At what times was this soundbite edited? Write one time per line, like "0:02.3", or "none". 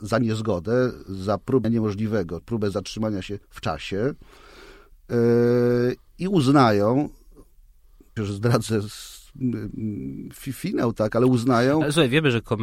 0:01.6
0:02.4
0:03.4
0:06.1
0:08.2